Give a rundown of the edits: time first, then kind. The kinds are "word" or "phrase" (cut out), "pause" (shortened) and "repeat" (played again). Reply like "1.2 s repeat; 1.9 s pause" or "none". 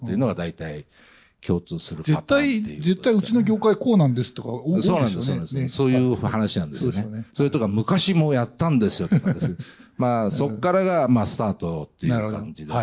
none